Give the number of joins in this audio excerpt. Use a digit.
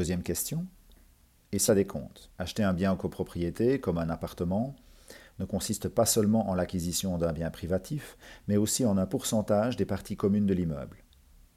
2